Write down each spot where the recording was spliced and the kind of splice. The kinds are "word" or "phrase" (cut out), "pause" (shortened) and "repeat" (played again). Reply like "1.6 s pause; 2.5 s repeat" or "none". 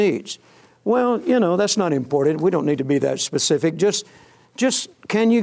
none